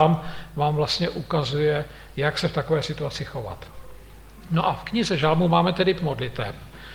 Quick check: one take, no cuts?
no; 1 cut; at 6.0 s

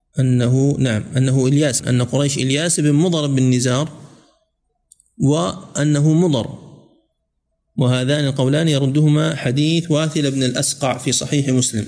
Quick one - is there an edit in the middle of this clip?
no; 0 cuts

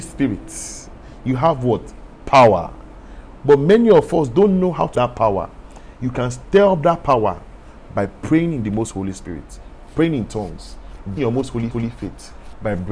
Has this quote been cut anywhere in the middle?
yes; 3 cuts; at 4.9 s, 11.2 s, 11.7 s

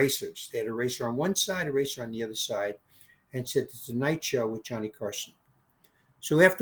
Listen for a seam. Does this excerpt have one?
no; 0 cuts

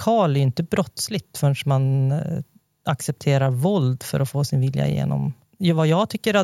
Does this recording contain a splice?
no; 0 cuts

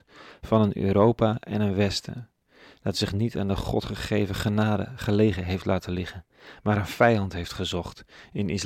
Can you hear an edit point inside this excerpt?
no; 0 cuts

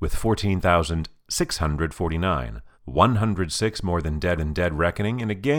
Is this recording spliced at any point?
yes; 2 cuts; at 2.7 s, 4.4 s

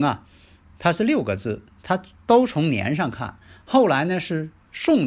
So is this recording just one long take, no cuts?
yes; 0 cuts

